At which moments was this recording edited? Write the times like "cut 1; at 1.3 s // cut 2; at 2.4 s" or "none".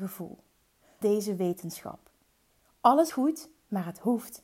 cut 1; at 1.0 s // cut 2; at 3.1 s